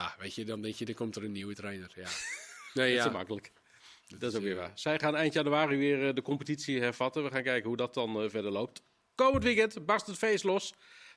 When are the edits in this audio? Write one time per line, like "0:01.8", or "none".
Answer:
none

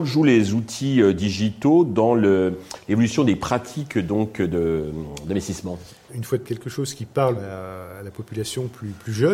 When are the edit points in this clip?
0:06.1
0:06.4
0:07.4

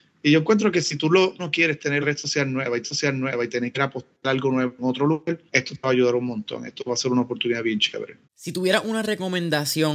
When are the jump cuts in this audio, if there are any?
0:01.4
0:02.0
0:02.8
0:03.7
0:05.5
0:08.2

